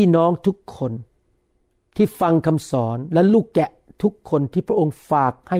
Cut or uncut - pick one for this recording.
uncut